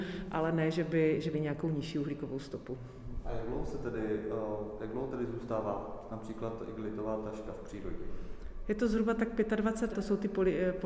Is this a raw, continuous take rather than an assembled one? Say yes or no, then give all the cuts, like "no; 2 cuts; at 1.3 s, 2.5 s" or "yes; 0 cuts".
no; 2 cuts; at 1.3 s, 9.9 s